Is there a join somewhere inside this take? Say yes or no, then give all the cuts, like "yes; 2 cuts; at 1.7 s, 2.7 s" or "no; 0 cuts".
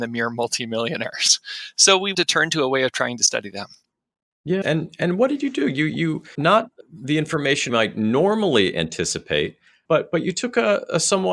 yes; 6 cuts; at 2.1 s, 4.6 s, 6.3 s, 6.8 s, 7.7 s, 9.9 s